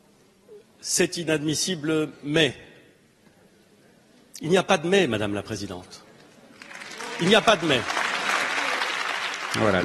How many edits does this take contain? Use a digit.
0